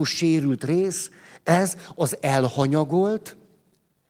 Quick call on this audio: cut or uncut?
uncut